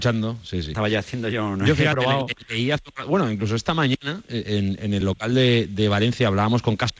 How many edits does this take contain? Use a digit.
0